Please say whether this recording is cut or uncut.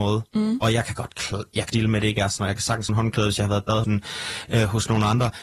cut